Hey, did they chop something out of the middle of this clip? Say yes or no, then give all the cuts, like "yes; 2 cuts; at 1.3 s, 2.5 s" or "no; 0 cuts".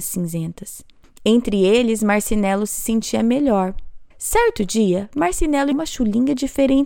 yes; 2 cuts; at 4.1 s, 5.7 s